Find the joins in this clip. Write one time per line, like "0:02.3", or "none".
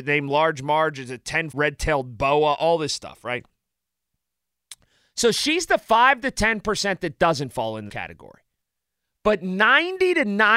0:01.5
0:07.9